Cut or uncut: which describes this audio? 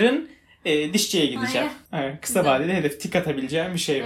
cut